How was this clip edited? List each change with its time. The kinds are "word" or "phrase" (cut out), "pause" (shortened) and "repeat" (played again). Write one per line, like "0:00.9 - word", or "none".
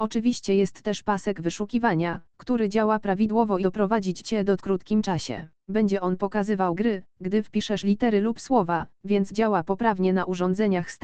0:03.6 - word
0:04.6 - phrase
0:05.6 - pause